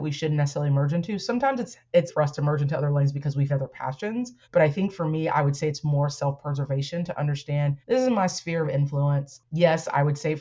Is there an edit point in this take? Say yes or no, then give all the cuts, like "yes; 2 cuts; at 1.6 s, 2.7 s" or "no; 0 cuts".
yes; 5 cuts; at 2.1 s, 3.5 s, 4.4 s, 7.8 s, 9.5 s